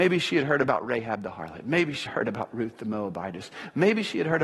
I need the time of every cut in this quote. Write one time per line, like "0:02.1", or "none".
0:02.1